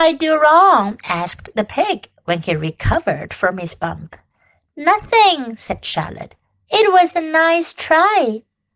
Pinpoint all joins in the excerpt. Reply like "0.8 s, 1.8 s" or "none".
none